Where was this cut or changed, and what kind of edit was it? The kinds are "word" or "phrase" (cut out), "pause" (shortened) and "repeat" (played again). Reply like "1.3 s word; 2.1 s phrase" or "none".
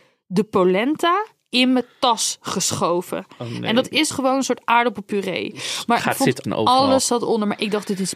4.1 s word; 6.4 s word